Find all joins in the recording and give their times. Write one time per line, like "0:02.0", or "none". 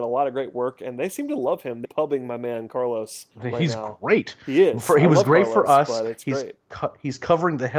0:01.8
0:03.3